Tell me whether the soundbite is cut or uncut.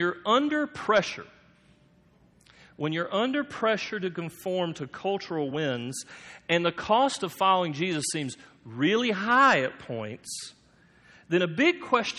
uncut